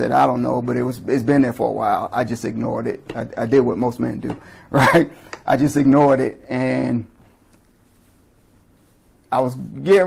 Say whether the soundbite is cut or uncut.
uncut